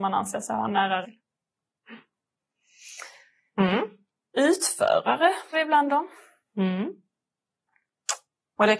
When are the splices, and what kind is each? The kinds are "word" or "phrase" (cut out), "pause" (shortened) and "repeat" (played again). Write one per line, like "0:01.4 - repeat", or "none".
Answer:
0:01.0 - word
0:05.5 - word